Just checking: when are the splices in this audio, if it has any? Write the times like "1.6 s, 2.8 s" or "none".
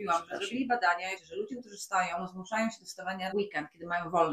1.2 s, 3.3 s